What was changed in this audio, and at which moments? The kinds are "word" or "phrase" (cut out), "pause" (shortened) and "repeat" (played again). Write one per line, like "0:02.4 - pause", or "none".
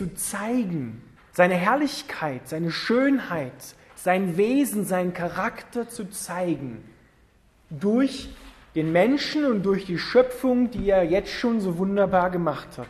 0:01.2 - pause